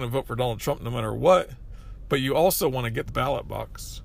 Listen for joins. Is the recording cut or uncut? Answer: cut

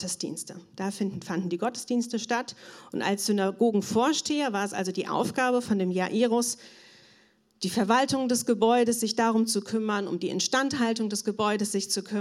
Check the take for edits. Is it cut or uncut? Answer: uncut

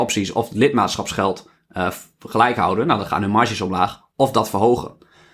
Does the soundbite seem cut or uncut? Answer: uncut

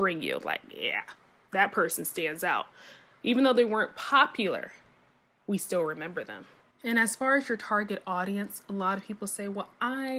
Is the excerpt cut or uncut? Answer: cut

